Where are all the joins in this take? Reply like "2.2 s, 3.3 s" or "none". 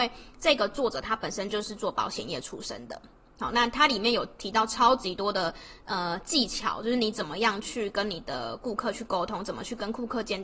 none